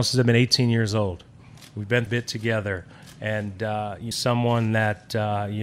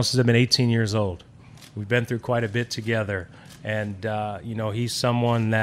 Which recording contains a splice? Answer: first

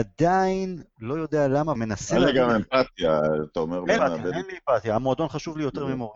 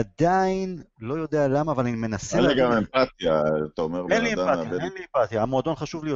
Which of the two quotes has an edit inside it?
first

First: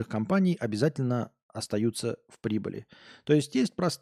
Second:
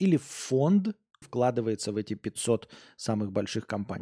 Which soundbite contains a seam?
second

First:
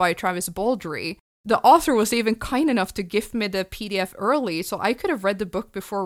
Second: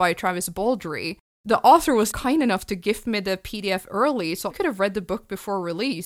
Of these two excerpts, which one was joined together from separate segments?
second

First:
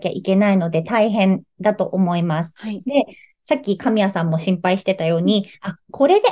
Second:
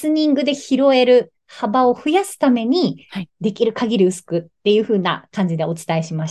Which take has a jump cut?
second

